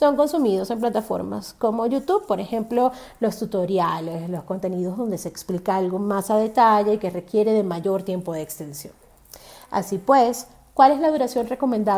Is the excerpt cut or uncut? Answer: uncut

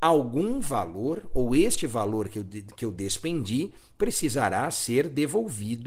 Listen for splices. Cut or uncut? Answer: uncut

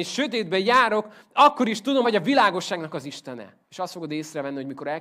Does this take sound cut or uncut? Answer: cut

